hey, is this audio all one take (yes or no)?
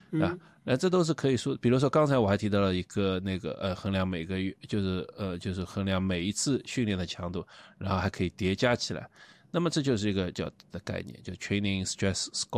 no